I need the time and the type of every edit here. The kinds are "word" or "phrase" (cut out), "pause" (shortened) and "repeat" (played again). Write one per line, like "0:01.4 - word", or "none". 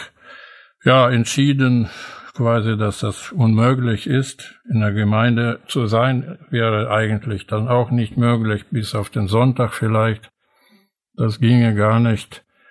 none